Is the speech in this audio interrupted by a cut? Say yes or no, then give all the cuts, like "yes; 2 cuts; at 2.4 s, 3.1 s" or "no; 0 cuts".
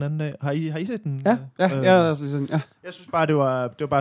yes; 1 cut; at 1.5 s